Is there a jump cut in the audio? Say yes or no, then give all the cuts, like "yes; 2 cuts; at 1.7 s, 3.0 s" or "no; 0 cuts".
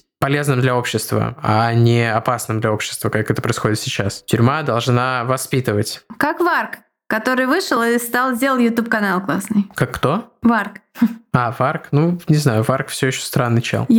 no; 0 cuts